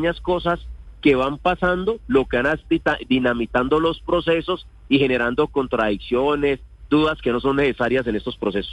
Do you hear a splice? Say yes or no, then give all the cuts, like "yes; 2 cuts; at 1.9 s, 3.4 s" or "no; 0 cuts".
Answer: no; 0 cuts